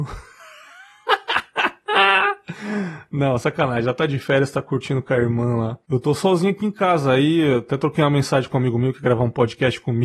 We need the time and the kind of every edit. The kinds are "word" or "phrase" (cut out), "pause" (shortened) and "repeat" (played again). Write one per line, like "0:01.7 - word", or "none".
none